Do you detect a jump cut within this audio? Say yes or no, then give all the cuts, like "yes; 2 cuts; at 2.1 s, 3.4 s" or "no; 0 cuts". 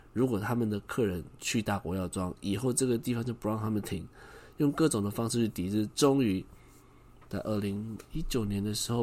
no; 0 cuts